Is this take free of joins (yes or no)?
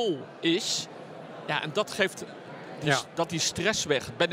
no